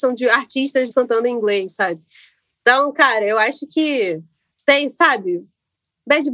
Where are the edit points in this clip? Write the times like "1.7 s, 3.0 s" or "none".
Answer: 0.9 s